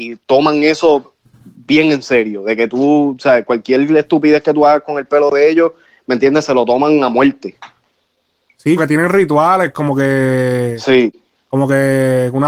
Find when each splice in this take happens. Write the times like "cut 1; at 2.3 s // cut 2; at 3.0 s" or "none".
cut 1; at 8.8 s